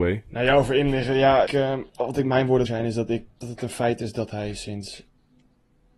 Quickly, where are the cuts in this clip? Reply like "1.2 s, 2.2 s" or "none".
1.5 s, 1.9 s, 2.7 s, 3.3 s